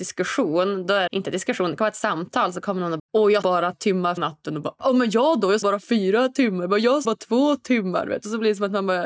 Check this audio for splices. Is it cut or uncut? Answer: cut